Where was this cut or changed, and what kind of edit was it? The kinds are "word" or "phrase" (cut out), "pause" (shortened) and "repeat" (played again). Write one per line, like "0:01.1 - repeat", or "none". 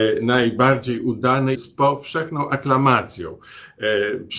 0:01.5 - phrase